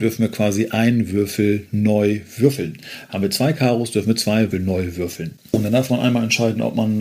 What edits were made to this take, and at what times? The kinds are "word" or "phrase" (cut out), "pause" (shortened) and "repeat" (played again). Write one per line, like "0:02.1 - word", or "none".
0:04.5 - word